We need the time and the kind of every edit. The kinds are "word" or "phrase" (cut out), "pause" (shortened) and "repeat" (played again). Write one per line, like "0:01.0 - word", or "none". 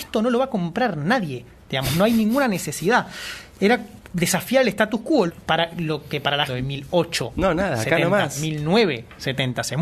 0:05.3 - word
0:06.5 - phrase